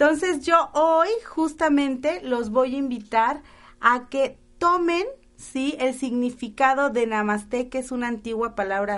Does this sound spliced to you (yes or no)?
no